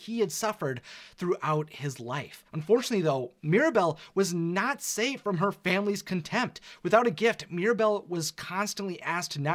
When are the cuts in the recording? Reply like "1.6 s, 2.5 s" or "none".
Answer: 2.5 s